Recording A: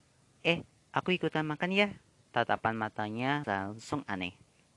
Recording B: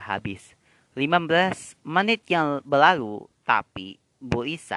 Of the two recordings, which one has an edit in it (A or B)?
A